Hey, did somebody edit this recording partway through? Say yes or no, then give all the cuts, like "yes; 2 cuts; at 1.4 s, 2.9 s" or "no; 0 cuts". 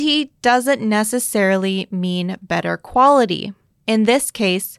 no; 0 cuts